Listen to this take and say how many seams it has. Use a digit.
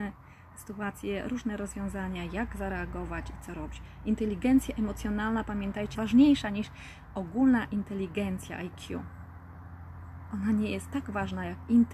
1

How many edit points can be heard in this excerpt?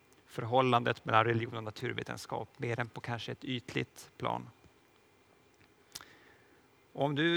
0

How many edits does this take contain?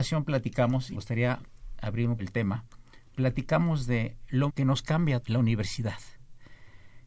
4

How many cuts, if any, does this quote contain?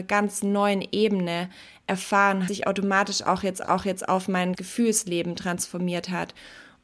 3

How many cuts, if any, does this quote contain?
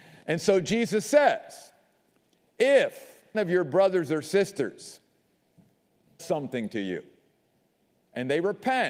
2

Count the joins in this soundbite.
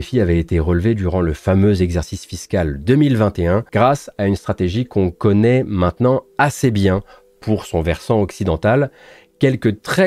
0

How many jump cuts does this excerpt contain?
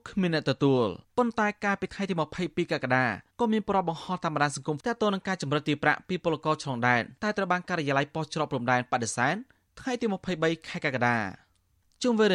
4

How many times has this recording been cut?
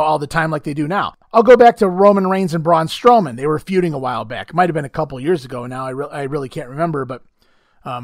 1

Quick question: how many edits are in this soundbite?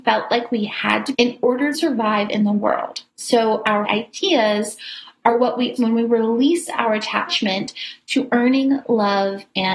5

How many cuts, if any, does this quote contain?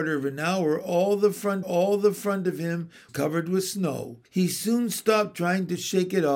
3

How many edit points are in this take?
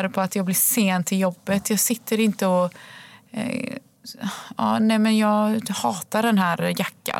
0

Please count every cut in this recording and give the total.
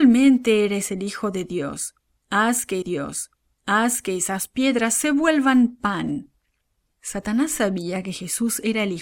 1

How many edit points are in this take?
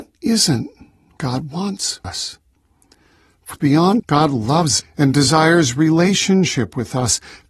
5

